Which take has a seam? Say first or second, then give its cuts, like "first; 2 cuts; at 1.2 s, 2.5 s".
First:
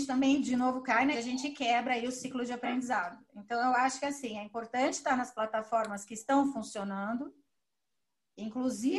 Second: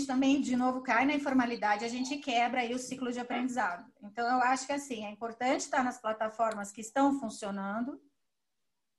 first; 1 cut; at 1.1 s